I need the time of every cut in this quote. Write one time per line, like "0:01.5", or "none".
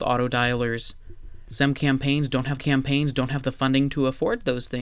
0:02.6